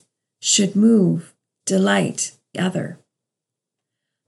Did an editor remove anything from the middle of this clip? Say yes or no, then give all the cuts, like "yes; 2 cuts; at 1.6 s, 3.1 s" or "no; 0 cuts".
yes; 1 cut; at 2.5 s